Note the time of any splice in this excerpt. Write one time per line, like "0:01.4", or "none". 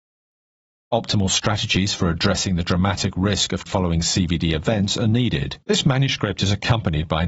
0:03.7
0:05.6